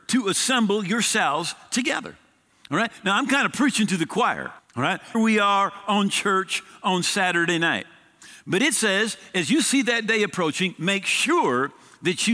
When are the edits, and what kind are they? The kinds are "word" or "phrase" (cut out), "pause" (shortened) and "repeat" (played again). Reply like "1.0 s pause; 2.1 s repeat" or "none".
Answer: 4.6 s pause; 5.1 s word